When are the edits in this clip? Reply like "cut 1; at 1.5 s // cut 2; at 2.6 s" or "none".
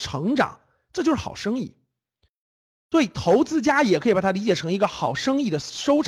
none